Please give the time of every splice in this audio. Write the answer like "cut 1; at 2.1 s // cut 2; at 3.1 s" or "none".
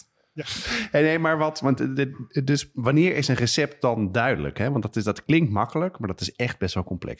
none

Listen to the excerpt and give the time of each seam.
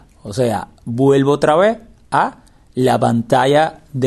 none

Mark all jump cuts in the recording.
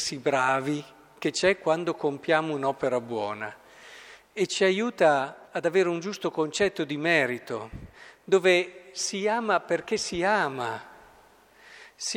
cut 1; at 5.5 s

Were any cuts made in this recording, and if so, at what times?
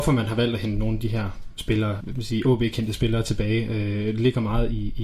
cut 1; at 1.5 s // cut 2; at 2.0 s

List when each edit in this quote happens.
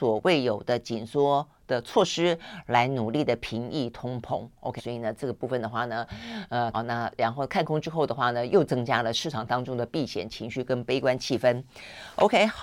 cut 1; at 4.8 s // cut 2; at 6.7 s

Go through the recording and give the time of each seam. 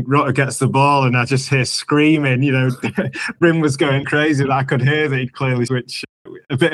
cut 1; at 4.0 s // cut 2; at 5.7 s

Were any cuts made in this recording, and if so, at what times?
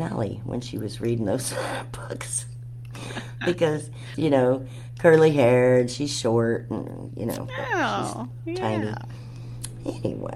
cut 1; at 4.1 s

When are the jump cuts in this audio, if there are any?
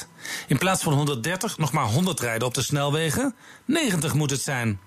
none

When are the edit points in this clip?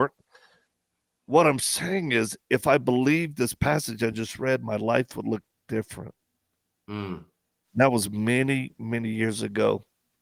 none

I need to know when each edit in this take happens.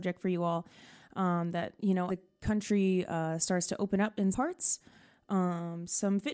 cut 1; at 2.1 s // cut 2; at 4.3 s

